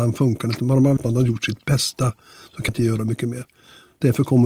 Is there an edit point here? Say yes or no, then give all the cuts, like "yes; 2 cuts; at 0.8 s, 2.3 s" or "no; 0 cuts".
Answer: yes; 2 cuts; at 1.0 s, 2.7 s